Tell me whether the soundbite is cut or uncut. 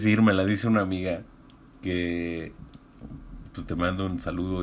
uncut